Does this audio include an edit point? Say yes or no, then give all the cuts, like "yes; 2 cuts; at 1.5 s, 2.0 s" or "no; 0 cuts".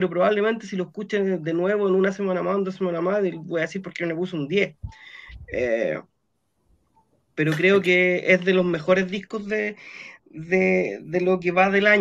no; 0 cuts